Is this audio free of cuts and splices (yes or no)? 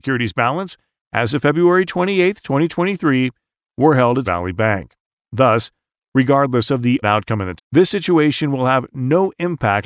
no